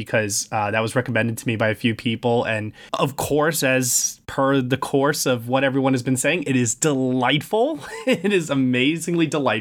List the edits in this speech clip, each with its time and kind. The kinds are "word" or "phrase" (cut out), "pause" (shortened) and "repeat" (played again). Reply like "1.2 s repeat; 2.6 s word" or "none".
2.9 s pause